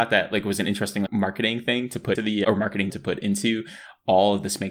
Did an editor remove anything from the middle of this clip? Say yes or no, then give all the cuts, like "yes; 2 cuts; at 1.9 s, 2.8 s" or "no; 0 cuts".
yes; 3 cuts; at 1.1 s, 2.2 s, 2.9 s